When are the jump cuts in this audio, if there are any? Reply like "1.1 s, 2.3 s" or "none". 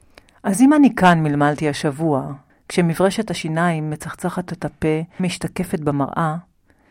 2.5 s, 4.5 s, 5.2 s